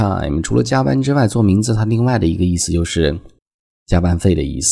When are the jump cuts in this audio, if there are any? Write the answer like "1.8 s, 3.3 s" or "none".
none